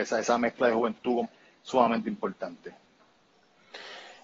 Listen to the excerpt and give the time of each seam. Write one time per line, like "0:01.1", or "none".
0:01.2